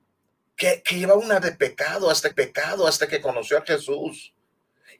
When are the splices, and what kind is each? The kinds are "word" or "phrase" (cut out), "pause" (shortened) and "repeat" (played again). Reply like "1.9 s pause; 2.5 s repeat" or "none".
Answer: 1.4 s word; 2.3 s repeat